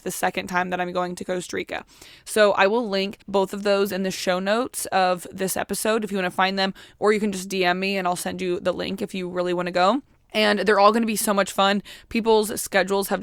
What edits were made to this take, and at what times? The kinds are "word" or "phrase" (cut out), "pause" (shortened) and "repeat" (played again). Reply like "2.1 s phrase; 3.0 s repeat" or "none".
3.2 s pause